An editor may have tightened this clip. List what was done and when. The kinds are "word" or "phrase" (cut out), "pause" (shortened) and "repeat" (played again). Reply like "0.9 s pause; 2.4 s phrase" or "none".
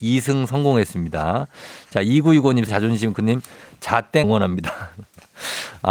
2.7 s word; 3.1 s word; 4.2 s word